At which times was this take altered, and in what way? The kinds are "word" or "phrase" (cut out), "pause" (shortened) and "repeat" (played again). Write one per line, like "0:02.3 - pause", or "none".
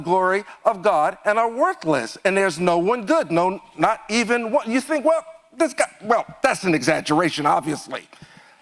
none